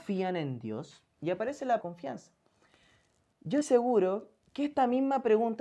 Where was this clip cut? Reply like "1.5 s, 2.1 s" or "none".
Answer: 1.1 s, 1.8 s, 3.6 s